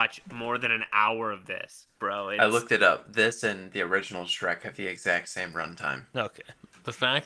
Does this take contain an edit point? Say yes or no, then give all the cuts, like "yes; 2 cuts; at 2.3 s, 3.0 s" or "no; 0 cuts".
yes; 1 cut; at 1.9 s